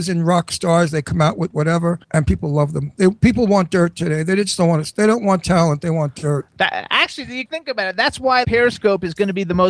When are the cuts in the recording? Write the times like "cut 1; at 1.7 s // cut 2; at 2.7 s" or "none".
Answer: cut 1; at 2.0 s // cut 2; at 7.5 s // cut 3; at 8.4 s